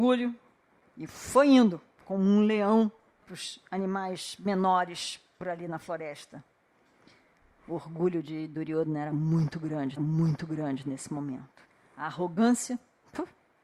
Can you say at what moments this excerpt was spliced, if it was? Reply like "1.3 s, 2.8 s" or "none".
3.2 s, 10.0 s, 11.7 s